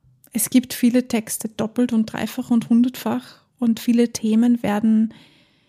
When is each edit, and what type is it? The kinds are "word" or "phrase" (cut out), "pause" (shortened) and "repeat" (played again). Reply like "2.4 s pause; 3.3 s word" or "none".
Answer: none